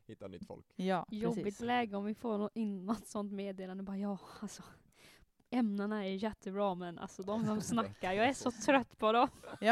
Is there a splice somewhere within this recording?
no; 0 cuts

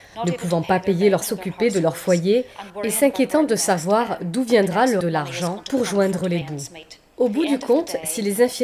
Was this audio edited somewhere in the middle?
yes; 3 cuts; at 1.2 s, 5.0 s, 6.4 s

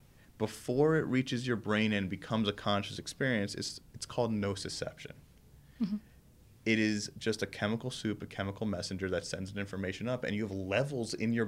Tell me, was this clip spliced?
no; 0 cuts

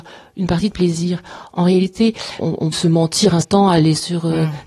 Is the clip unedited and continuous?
no; 3 cuts; at 2.4 s, 2.7 s, 3.4 s

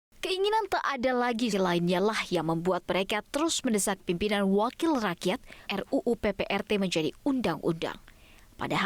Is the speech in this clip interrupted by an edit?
yes; 3 cuts; at 1.5 s, 4.0 s, 5.7 s

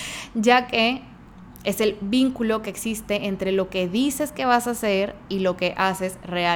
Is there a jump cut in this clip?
no; 0 cuts

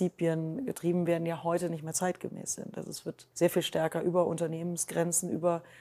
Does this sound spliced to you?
yes; 1 cut; at 3.3 s

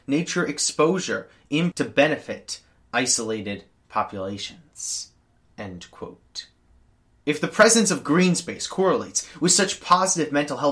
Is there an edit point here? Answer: yes; 1 cut; at 1.7 s

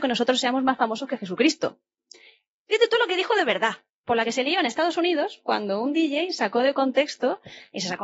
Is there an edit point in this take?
yes; 1 cut; at 3.9 s

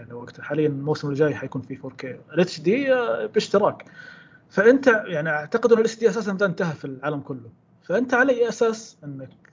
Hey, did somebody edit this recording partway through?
no; 0 cuts

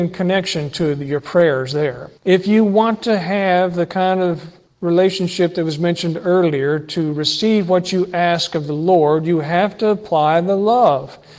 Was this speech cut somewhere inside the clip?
yes; 2 cuts; at 2.2 s, 4.7 s

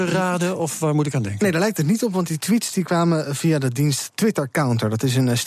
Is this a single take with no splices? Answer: yes; 0 cuts

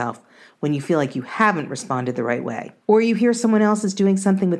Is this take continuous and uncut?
no; 1 cut; at 2.8 s

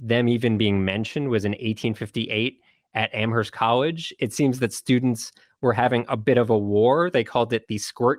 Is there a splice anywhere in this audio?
no; 0 cuts

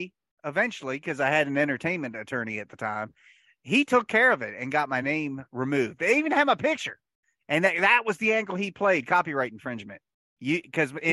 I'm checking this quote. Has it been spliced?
no; 0 cuts

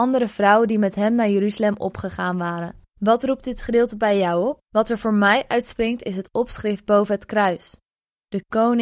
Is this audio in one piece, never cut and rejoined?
no; 2 cuts; at 2.9 s, 4.6 s

